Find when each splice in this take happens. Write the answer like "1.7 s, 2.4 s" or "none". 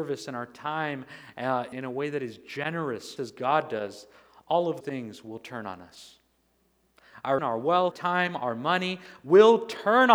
1.7 s, 3.2 s, 4.8 s, 7.4 s, 7.9 s

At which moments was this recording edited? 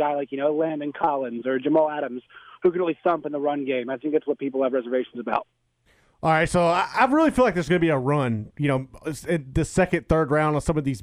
none

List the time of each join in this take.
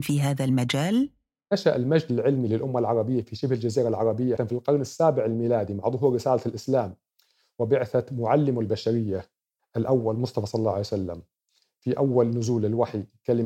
4.4 s, 9.6 s

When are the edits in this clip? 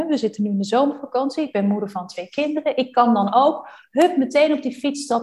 none

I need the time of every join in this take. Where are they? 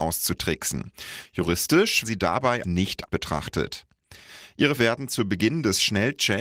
2.0 s, 2.6 s, 3.1 s, 4.8 s

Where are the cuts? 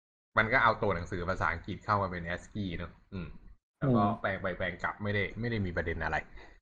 none

